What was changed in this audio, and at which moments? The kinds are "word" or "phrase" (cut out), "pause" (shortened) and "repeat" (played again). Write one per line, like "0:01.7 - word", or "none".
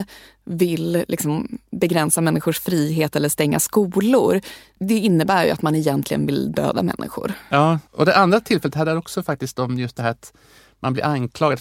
0:07.9 - pause